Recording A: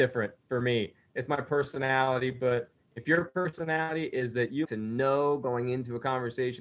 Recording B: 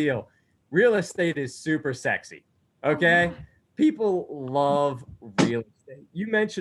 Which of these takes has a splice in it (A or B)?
A